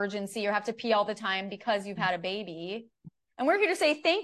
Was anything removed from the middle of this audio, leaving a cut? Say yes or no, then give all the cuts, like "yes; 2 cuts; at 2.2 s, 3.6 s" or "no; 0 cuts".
no; 0 cuts